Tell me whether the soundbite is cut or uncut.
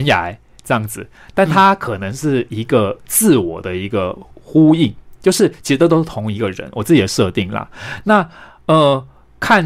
cut